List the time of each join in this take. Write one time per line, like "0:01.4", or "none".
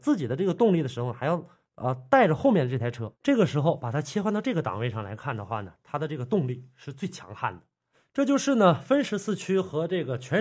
none